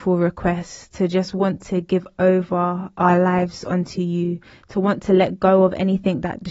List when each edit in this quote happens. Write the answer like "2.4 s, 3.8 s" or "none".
none